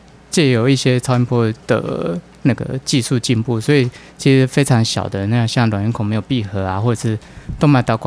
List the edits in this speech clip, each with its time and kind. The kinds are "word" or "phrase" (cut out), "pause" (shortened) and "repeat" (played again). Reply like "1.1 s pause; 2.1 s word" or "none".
1.6 s pause